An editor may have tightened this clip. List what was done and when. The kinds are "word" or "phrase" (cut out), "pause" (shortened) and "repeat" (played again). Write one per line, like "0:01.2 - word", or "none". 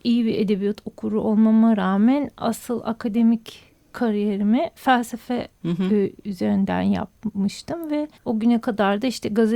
0:08.2 - pause